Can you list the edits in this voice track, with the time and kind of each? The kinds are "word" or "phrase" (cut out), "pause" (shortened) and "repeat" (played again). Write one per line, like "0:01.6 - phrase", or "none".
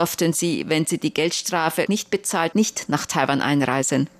0:01.9 - word
0:02.5 - word
0:02.9 - word